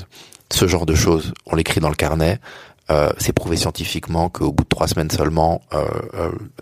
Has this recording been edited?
no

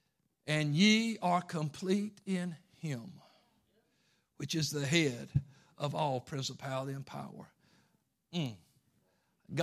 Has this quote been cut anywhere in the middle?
no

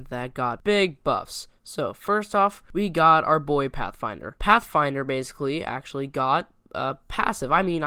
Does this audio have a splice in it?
no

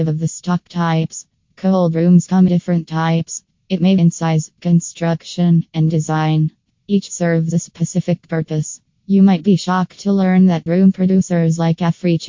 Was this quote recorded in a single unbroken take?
no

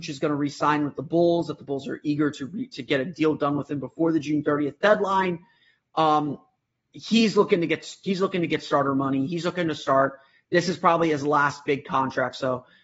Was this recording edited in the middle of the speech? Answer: no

